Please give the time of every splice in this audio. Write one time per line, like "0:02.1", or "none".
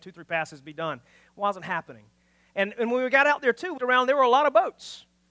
0:03.8